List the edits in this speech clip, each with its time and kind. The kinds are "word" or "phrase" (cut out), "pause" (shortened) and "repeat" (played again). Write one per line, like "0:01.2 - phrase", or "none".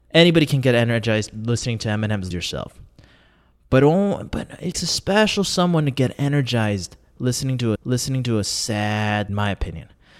0:02.3 - word
0:04.7 - word
0:07.8 - repeat
0:09.3 - phrase